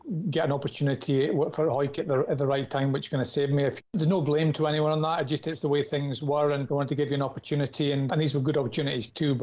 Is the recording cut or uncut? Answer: cut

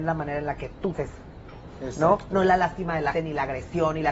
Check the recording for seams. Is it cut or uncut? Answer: cut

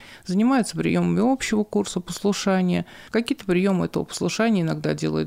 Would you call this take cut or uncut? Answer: cut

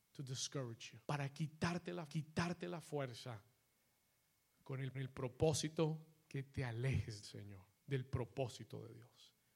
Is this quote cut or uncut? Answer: cut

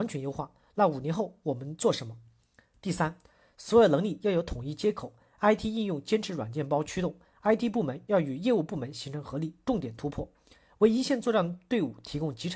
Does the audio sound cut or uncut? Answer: uncut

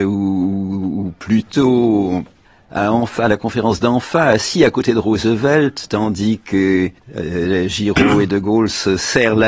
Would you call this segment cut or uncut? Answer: cut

